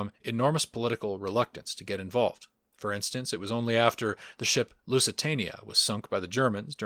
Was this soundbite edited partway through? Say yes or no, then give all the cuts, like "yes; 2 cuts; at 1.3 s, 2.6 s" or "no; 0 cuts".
yes; 1 cut; at 2.6 s